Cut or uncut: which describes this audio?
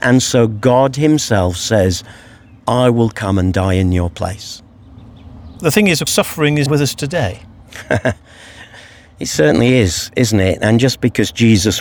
cut